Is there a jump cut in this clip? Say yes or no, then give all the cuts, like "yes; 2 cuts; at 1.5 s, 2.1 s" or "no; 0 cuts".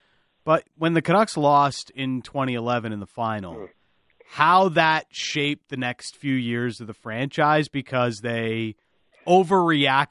no; 0 cuts